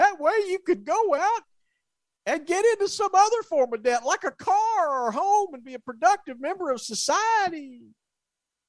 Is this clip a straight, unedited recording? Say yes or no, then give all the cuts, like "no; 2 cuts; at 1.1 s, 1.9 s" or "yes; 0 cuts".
yes; 0 cuts